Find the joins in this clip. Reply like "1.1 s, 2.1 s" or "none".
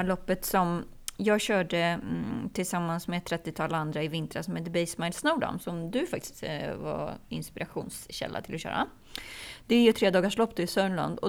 none